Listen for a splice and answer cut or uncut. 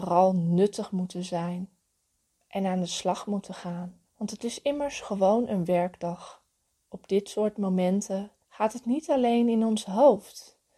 cut